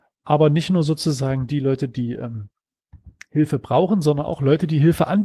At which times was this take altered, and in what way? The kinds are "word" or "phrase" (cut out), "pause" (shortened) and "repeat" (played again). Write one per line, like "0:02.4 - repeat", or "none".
none